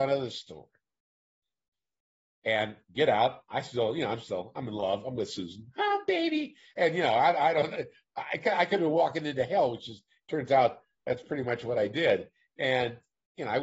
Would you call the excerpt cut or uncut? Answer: uncut